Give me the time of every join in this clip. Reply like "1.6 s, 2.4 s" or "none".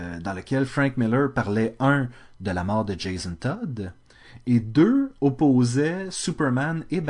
none